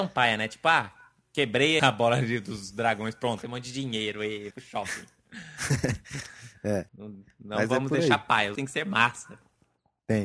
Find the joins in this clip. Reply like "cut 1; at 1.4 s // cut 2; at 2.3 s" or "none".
cut 1; at 1.8 s // cut 2; at 3.4 s // cut 3; at 4.5 s // cut 4; at 6.9 s // cut 5; at 8.5 s

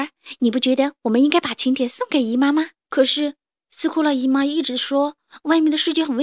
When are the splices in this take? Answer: cut 1; at 2.8 s

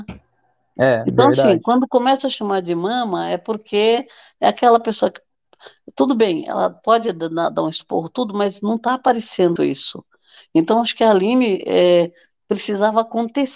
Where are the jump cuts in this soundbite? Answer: cut 1; at 9.6 s

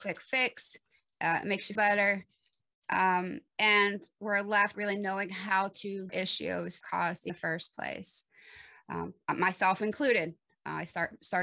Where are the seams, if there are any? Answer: cut 1; at 1.8 s // cut 2; at 3.5 s // cut 3; at 4.7 s // cut 4; at 6.1 s // cut 5; at 6.8 s // cut 6; at 7.3 s

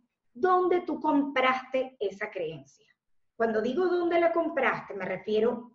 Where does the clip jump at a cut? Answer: none

